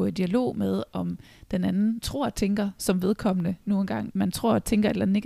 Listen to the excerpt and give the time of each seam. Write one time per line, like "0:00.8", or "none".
0:02.0
0:04.1